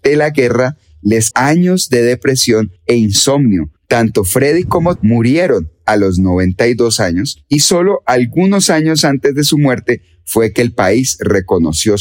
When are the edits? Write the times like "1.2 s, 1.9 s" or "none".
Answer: 1.3 s, 2.8 s, 3.8 s, 5.0 s